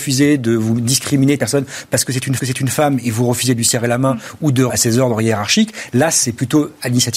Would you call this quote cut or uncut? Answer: cut